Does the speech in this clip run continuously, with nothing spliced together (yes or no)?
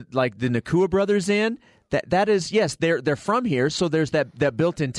yes